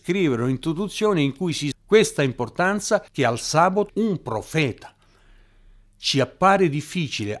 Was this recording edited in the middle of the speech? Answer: yes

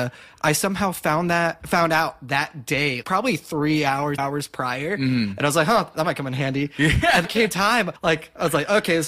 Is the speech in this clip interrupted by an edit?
yes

